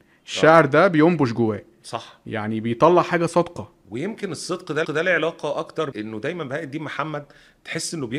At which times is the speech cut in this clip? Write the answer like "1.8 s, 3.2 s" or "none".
4.8 s, 5.9 s